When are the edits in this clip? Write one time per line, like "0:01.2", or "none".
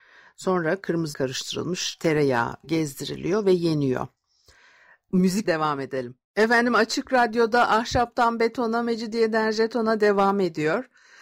0:01.1
0:02.6
0:05.4
0:06.2